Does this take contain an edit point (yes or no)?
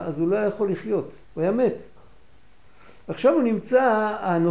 yes